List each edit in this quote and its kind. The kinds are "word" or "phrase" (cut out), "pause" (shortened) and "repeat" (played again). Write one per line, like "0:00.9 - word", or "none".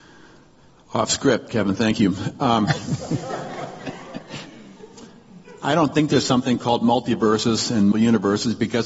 0:07.9 - word